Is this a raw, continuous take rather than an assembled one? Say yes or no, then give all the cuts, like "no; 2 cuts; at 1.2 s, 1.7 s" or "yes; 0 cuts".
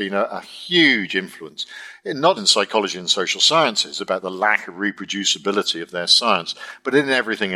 no; 1 cut; at 2.4 s